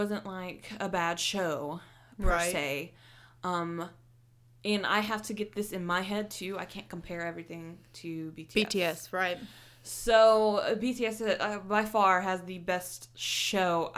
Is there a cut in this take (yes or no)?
no